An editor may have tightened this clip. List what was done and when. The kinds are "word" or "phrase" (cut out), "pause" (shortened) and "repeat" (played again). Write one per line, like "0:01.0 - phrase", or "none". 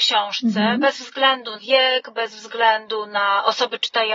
0:01.6 - word